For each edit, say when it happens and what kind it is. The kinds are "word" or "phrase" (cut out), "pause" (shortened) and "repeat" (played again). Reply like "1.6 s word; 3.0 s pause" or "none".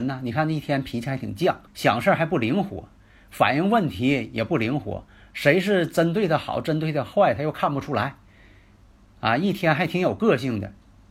1.7 s pause